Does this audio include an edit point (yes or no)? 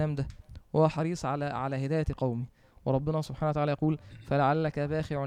no